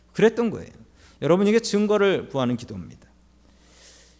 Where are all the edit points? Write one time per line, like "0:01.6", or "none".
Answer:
none